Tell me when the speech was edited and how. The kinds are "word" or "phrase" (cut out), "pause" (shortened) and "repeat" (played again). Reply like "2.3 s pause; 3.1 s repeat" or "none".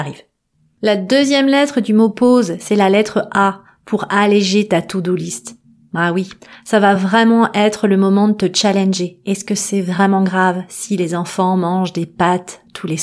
none